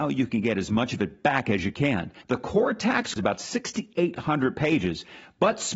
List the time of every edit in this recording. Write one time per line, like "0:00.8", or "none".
0:02.2
0:03.2